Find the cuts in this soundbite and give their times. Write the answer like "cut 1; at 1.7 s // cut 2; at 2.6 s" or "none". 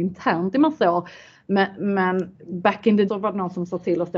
cut 1; at 2.3 s // cut 2; at 3.1 s